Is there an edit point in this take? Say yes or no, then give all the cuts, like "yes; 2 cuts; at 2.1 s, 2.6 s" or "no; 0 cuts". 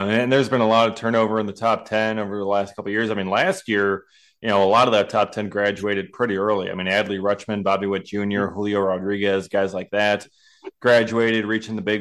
no; 0 cuts